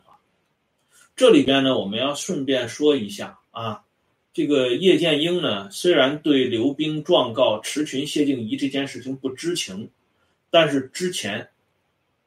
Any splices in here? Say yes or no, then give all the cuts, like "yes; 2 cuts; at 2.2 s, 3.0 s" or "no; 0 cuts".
yes; 1 cut; at 3.5 s